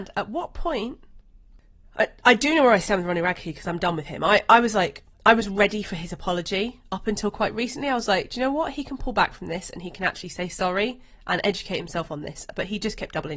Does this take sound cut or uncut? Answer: uncut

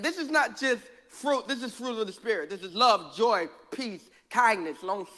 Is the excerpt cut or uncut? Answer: uncut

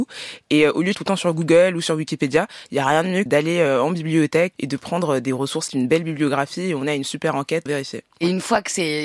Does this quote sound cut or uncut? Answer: cut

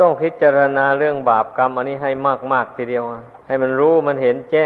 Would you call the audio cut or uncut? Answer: cut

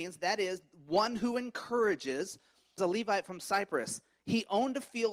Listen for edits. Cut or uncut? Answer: cut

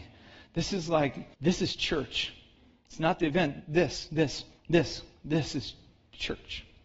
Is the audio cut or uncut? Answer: cut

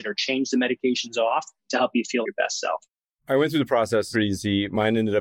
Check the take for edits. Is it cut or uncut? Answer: cut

